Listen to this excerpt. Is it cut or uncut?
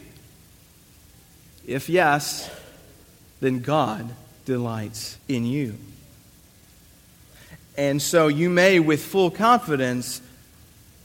cut